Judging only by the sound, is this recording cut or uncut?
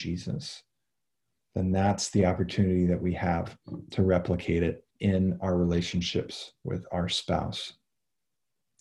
cut